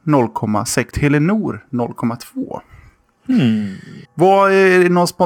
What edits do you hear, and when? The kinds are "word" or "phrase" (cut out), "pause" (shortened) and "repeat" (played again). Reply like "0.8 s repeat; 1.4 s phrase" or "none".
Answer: 0.9 s word; 4.1 s pause